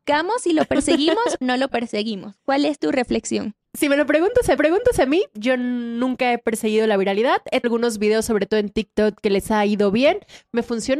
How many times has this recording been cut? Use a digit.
4